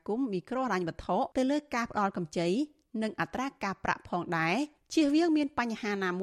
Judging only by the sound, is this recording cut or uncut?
cut